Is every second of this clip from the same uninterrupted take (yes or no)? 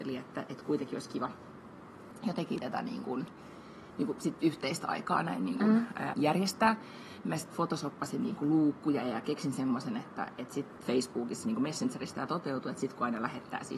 no